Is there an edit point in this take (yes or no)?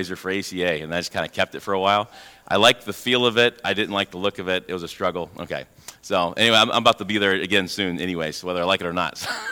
no